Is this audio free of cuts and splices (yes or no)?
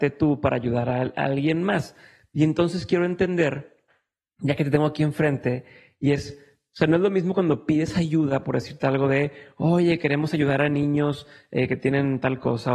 yes